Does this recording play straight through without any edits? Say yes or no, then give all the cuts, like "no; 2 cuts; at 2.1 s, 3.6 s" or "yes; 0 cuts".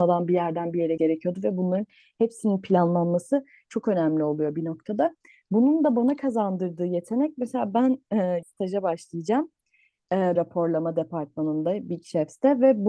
no; 3 cuts; at 1.0 s, 8.4 s, 10.4 s